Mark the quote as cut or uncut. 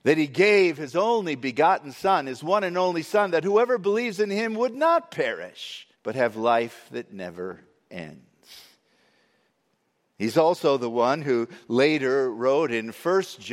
cut